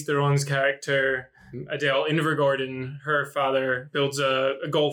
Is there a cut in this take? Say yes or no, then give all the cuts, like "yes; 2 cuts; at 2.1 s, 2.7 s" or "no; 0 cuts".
no; 0 cuts